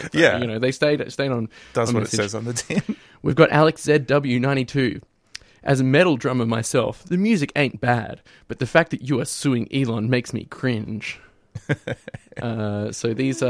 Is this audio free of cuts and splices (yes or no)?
yes